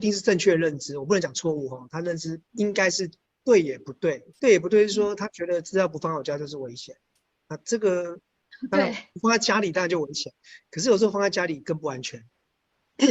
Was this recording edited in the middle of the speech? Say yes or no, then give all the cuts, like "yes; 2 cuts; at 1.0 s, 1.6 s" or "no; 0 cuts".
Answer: yes; 4 cuts; at 2.4 s, 3.2 s, 4.3 s, 9.1 s